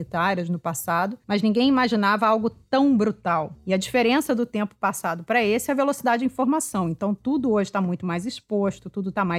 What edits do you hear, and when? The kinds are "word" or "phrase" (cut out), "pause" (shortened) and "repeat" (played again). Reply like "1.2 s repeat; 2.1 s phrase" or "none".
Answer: 1.2 s pause